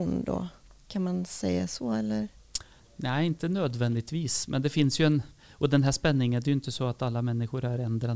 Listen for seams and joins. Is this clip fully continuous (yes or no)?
yes